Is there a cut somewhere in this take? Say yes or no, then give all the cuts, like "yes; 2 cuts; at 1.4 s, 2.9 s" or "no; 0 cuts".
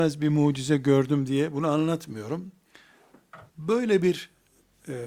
yes; 1 cut; at 3.5 s